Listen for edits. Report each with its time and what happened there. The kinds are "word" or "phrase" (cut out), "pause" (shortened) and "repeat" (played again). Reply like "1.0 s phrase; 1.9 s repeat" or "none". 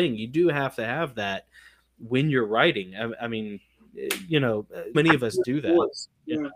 4.9 s word